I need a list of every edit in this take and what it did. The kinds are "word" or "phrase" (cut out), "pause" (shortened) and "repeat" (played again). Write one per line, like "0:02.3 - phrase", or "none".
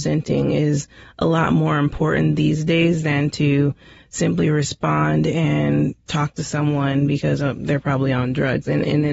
none